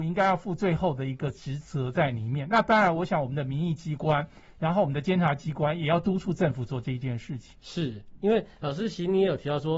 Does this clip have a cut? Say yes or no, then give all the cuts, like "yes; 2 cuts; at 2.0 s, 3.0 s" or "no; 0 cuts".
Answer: yes; 1 cut; at 7.6 s